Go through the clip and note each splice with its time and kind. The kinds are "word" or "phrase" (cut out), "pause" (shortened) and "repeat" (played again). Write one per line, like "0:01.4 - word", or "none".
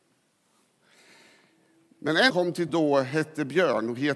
0:02.3 - phrase
0:02.7 - word